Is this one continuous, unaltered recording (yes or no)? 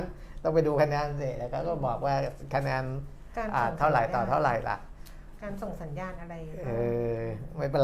yes